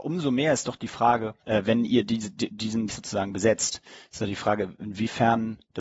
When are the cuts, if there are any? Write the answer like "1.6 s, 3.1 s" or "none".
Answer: 1.4 s, 2.9 s